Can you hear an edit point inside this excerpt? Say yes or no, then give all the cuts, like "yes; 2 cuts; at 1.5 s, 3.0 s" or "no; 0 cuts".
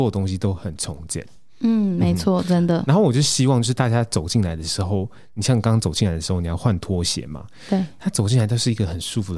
no; 0 cuts